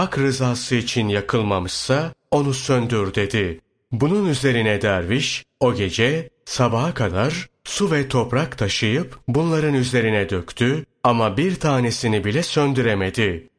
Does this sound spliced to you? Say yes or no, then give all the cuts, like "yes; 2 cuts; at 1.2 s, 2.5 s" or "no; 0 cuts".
no; 0 cuts